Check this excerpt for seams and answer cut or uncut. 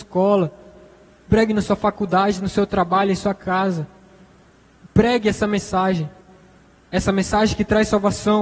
uncut